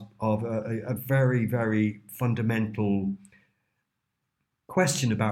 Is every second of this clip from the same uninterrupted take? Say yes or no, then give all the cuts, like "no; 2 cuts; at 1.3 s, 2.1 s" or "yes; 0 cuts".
yes; 0 cuts